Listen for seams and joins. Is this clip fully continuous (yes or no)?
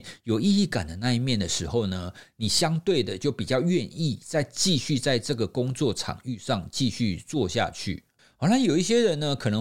yes